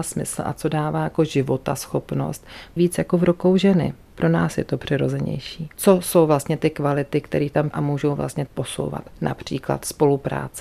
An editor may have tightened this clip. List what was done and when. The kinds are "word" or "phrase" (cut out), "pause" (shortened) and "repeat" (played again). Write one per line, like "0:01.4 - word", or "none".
0:02.8 - word
0:05.7 - pause
0:07.7 - word
0:08.5 - phrase